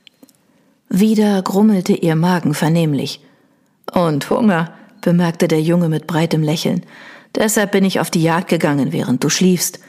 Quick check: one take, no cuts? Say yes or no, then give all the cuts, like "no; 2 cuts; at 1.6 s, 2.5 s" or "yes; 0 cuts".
yes; 0 cuts